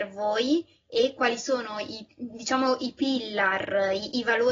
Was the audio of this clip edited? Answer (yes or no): no